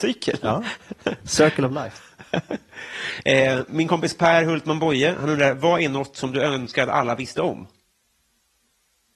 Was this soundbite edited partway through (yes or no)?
no